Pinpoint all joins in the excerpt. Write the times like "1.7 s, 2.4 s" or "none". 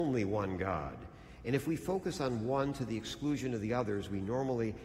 none